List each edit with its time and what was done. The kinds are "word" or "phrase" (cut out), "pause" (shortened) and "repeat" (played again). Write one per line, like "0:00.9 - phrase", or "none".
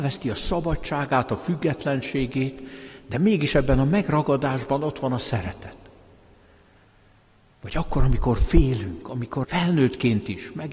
0:09.4 - word